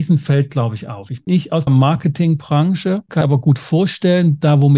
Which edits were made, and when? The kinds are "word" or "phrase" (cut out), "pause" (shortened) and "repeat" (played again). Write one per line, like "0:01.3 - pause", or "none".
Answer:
0:01.3 - word
0:01.7 - word
0:03.2 - word